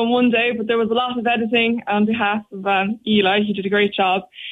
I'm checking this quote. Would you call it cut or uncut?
uncut